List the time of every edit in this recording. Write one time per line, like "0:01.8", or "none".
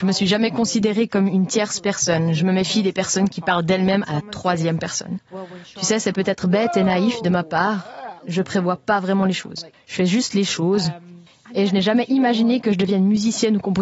0:08.2
0:09.7
0:11.3